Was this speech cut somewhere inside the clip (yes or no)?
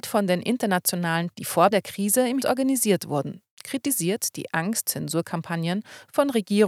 yes